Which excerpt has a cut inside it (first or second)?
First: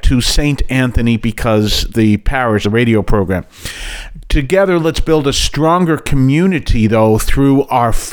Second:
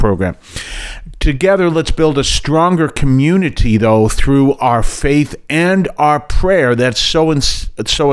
first